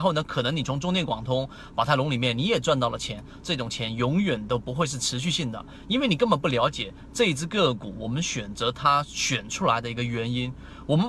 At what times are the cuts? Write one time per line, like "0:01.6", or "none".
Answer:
0:03.4